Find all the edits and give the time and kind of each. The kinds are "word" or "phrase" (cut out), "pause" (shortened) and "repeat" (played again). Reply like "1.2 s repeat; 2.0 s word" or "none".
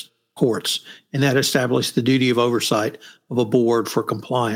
none